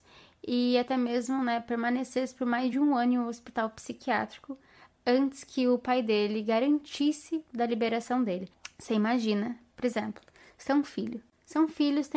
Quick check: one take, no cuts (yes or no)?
yes